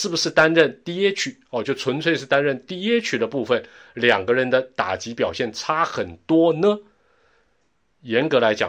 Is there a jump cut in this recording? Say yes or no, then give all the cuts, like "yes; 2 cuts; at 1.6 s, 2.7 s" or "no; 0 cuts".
no; 0 cuts